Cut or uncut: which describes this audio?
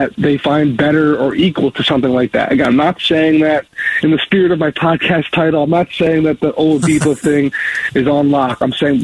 uncut